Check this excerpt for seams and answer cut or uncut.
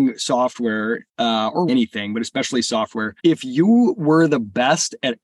cut